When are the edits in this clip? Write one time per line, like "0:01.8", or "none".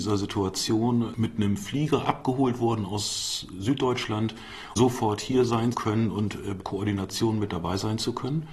0:04.8
0:05.7
0:06.6